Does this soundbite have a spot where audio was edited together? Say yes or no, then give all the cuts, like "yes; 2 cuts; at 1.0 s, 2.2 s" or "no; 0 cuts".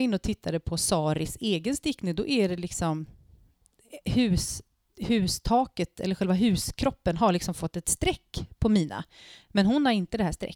no; 0 cuts